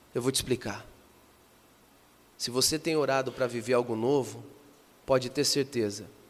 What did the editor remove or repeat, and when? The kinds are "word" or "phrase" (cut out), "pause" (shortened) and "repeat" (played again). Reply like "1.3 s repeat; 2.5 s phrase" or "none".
none